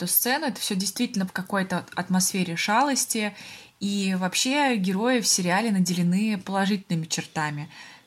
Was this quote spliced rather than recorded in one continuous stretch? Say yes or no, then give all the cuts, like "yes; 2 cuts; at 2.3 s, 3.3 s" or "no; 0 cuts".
yes; 1 cut; at 1.3 s